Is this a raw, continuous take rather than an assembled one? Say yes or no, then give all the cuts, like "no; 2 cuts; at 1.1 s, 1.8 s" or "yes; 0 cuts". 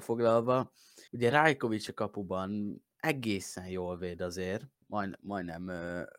no; 2 cuts; at 1.1 s, 4.7 s